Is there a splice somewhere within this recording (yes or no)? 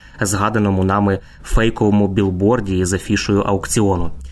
no